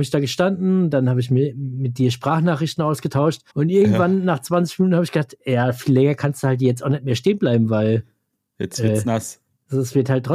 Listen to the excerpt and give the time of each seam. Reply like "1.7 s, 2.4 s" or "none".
3.5 s